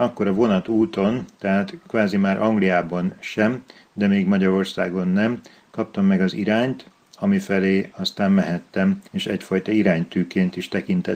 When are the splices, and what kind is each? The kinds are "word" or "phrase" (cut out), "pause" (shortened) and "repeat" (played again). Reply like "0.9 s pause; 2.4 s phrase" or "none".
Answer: 9.1 s pause